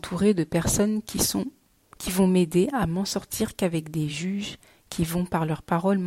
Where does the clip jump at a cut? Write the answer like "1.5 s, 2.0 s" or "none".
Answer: none